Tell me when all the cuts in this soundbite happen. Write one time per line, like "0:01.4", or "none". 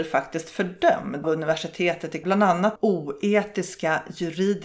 0:01.2
0:02.2
0:02.8